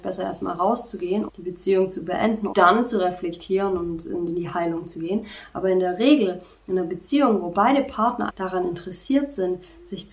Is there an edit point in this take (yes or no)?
yes